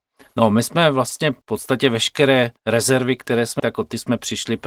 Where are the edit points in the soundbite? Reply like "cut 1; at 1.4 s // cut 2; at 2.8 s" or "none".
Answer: cut 1; at 1.4 s // cut 2; at 2.6 s // cut 3; at 3.6 s